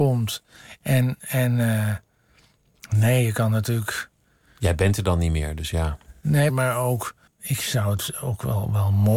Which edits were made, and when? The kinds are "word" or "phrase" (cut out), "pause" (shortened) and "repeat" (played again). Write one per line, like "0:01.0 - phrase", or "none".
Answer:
0:06.5 - word
0:07.3 - pause